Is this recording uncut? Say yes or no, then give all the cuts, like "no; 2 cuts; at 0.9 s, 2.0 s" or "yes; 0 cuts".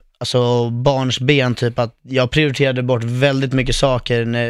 yes; 0 cuts